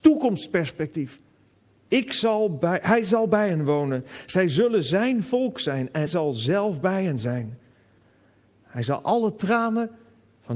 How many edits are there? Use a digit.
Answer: 2